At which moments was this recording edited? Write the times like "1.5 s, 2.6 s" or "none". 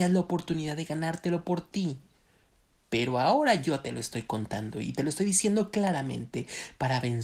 none